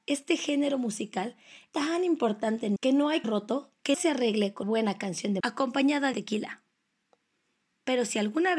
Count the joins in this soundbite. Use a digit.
7